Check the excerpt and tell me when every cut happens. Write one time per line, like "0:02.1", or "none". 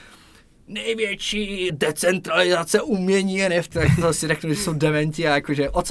0:01.7
0:03.7